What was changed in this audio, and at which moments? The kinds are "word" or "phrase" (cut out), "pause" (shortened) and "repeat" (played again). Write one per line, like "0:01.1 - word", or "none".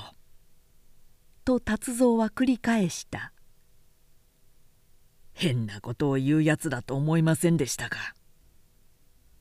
0:08.4 - pause